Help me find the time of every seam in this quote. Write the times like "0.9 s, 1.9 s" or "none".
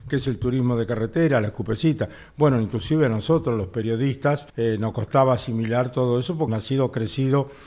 4.5 s, 6.5 s